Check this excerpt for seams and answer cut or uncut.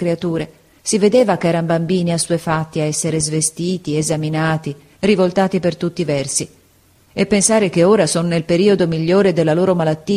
uncut